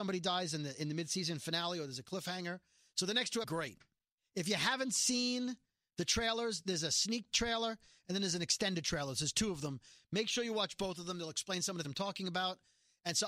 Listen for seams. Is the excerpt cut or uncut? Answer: cut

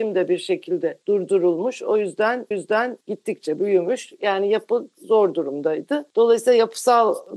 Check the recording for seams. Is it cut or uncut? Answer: cut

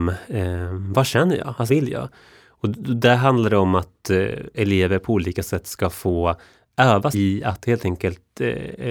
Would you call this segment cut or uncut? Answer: cut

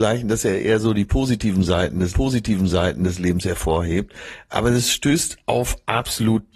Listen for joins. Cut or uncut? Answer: cut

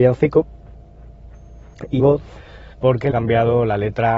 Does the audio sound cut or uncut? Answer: cut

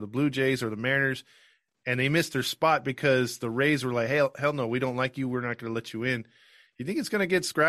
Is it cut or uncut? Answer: uncut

